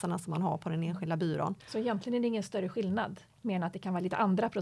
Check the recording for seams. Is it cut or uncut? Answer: cut